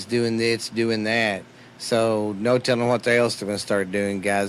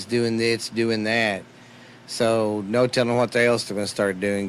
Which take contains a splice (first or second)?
first